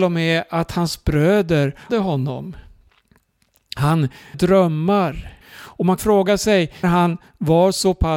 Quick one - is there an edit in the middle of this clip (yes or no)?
yes